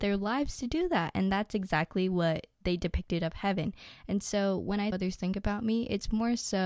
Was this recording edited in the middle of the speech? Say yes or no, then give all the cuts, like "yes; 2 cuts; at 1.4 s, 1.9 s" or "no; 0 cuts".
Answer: yes; 1 cut; at 4.9 s